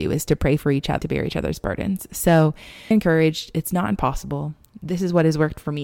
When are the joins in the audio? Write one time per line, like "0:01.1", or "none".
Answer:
0:01.0
0:02.9